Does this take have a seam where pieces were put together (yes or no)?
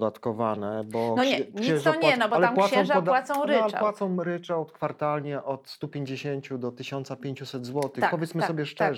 no